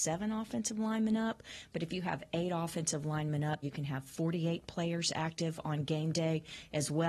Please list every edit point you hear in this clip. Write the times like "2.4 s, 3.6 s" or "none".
3.6 s